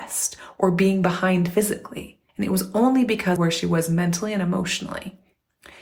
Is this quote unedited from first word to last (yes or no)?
no